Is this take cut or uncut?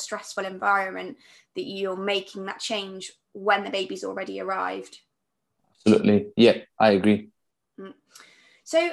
uncut